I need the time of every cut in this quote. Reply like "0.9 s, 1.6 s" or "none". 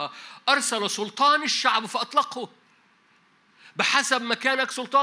none